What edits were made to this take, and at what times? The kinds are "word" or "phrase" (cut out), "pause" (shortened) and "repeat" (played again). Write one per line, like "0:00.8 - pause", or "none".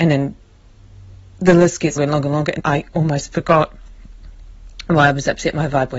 0:02.0 - word
0:02.6 - word